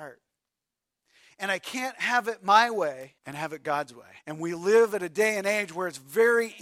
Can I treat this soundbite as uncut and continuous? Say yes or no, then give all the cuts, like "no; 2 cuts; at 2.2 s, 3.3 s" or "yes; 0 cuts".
no; 2 cuts; at 3.2 s, 4.2 s